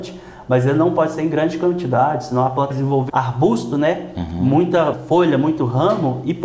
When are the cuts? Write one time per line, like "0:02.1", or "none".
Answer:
0:02.7
0:03.1
0:04.9